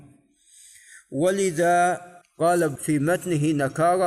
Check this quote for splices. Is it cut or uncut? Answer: cut